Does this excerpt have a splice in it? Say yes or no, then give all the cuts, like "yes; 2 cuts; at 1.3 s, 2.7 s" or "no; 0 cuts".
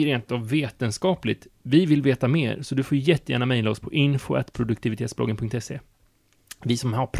no; 0 cuts